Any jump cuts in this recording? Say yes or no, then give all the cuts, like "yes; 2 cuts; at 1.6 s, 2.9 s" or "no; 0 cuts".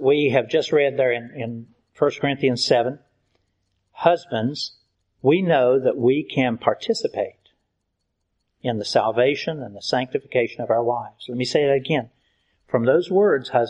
no; 0 cuts